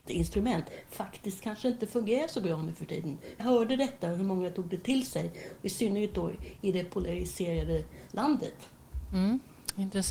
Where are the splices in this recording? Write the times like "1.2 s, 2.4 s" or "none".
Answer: 3.4 s